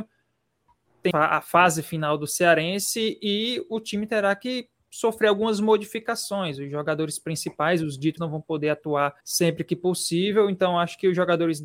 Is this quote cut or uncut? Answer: cut